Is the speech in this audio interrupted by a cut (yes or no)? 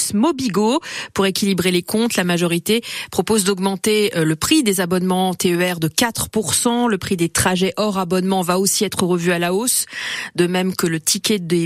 no